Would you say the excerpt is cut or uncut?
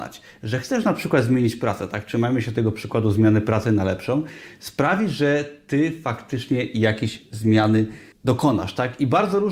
cut